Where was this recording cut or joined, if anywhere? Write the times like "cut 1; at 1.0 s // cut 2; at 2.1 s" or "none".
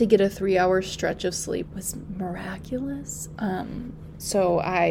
cut 1; at 1.7 s